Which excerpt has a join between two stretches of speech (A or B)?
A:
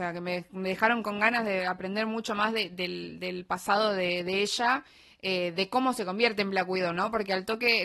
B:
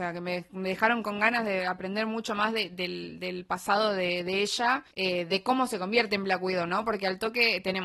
B